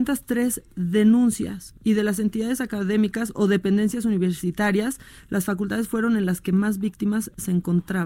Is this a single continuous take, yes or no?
yes